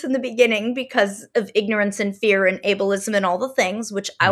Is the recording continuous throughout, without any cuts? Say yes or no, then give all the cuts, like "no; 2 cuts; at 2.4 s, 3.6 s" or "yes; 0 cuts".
yes; 0 cuts